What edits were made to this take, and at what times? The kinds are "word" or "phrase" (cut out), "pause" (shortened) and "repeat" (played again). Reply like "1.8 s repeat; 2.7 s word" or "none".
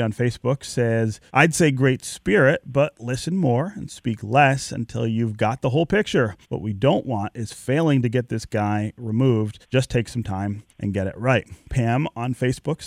1.3 s pause; 6.4 s pause; 9.6 s pause; 10.7 s pause